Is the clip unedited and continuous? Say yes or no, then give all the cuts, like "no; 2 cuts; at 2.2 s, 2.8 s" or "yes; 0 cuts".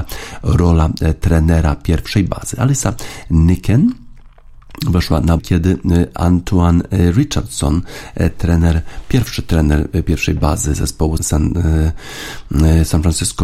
no; 2 cuts; at 5.4 s, 11.2 s